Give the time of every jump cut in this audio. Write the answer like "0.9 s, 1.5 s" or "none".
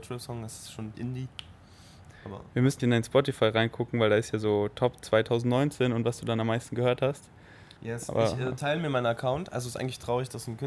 0.9 s, 2.8 s, 7.8 s